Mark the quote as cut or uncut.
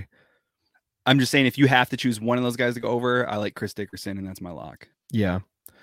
cut